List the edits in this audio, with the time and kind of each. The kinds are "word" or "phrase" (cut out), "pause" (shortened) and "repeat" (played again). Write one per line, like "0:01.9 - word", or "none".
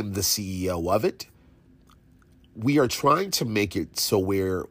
none